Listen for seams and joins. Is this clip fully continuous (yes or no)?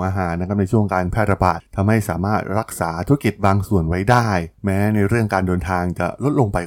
no